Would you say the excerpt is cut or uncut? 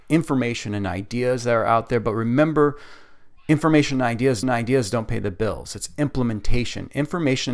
cut